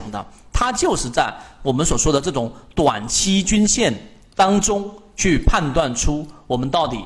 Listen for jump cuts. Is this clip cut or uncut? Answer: uncut